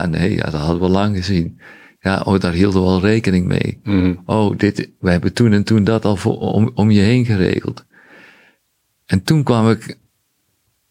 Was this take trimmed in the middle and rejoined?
no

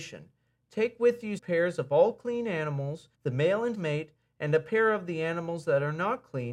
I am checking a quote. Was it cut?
yes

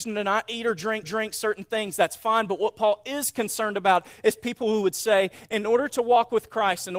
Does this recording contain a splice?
yes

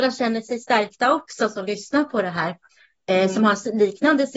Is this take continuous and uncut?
yes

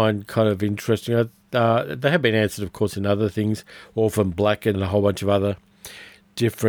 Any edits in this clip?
yes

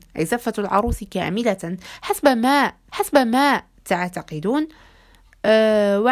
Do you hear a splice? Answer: yes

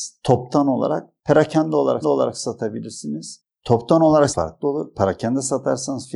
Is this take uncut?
no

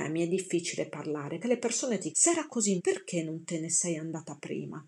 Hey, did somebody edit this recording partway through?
yes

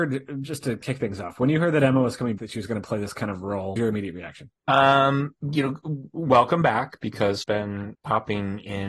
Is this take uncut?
no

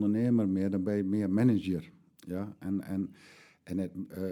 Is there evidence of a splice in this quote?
no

